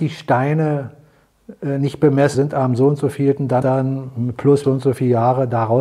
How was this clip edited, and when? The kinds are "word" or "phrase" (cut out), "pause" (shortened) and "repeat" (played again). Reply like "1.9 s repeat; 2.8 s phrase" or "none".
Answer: 2.3 s phrase; 3.6 s word; 4.6 s word